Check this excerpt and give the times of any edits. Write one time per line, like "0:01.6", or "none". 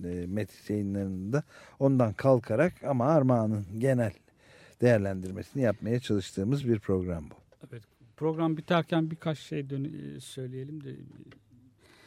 none